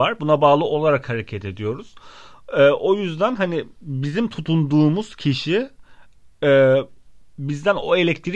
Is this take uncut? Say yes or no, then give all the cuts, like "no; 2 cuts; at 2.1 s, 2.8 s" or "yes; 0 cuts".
yes; 0 cuts